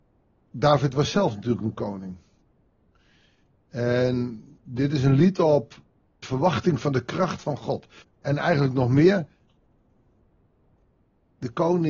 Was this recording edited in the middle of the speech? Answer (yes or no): yes